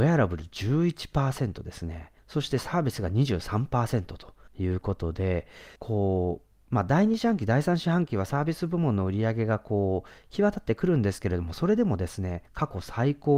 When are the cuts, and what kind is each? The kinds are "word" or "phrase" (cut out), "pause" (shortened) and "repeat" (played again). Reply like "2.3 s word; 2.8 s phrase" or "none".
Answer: 2.2 s pause; 4.5 s pause; 5.8 s pause; 12.5 s pause